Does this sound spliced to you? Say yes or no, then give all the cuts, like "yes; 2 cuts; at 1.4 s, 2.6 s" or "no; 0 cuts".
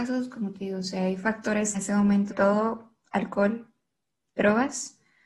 yes; 2 cuts; at 1.7 s, 2.3 s